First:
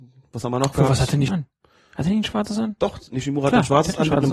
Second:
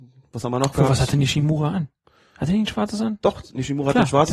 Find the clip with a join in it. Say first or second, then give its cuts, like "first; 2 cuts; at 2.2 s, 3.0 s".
first; 1 cut; at 1.3 s